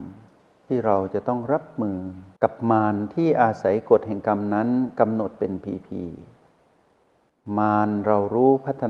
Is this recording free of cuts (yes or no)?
no